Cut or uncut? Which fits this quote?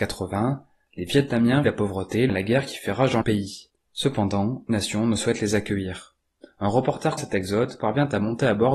cut